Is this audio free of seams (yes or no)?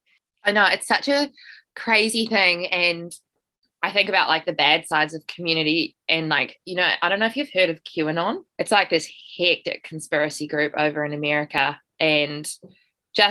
no